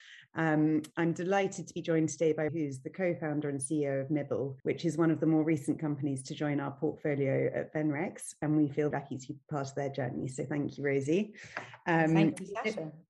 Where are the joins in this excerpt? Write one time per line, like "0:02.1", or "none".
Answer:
0:02.5
0:04.6
0:08.9